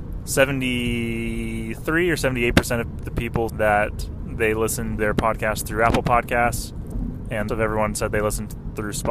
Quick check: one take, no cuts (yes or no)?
no